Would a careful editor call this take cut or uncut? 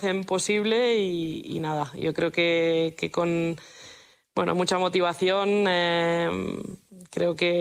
uncut